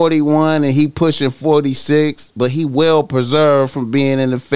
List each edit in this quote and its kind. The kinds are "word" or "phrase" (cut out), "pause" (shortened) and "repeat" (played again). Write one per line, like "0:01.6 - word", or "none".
none